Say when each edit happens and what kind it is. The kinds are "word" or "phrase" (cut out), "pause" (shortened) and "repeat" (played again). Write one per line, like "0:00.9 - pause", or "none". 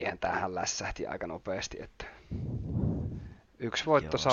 none

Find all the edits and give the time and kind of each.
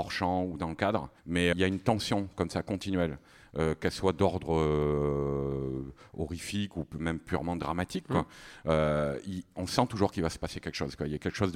0:01.2 - pause
0:01.5 - word

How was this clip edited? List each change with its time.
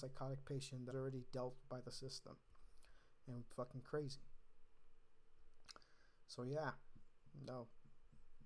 0:00.9 - word
0:01.6 - word
0:03.5 - phrase

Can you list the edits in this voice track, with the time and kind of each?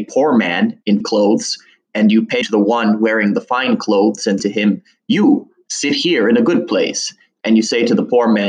0:01.0 - word
0:02.4 - word
0:04.4 - word

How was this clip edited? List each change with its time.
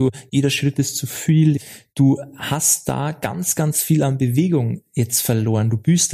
none

